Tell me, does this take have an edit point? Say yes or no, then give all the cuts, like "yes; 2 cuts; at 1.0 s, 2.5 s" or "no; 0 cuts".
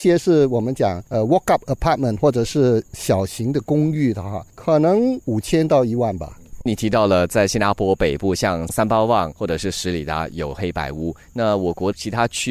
no; 0 cuts